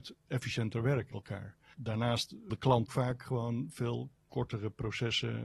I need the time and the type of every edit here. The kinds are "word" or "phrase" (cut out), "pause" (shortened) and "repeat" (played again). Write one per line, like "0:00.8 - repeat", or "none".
0:01.1 - word
0:02.5 - word
0:02.9 - word

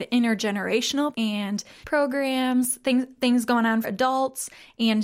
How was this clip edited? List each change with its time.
0:01.1 - word
0:01.8 - word
0:03.2 - word
0:03.8 - word

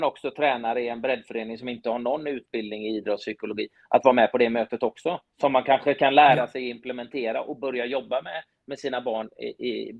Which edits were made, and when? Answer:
0:05.3 - pause

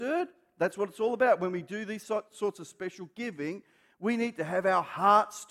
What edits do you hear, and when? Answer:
none

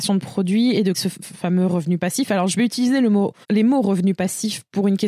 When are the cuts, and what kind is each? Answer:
0:00.9 - word
0:03.4 - pause

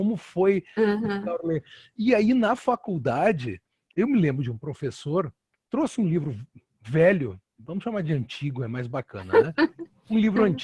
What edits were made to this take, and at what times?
none

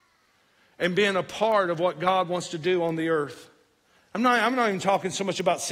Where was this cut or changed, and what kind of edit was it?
none

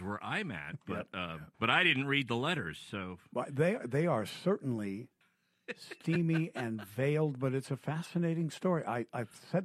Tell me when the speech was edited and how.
0:01.5 - pause
0:05.2 - pause

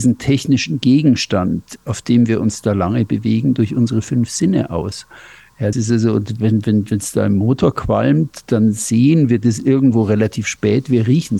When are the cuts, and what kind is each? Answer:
0:05.7 - phrase

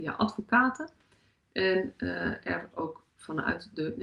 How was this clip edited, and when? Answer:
0:02.7 - word

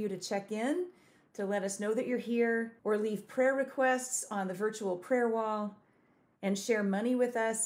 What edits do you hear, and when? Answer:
0:02.8 - pause

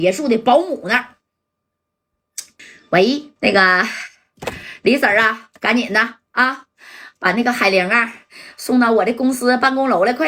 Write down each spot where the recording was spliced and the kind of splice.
0:03.4 - pause
0:05.6 - pause

